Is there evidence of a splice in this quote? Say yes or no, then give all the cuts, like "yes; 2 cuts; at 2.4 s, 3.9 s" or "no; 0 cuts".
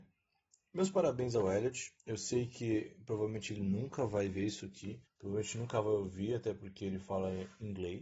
yes; 2 cuts; at 2.0 s, 5.0 s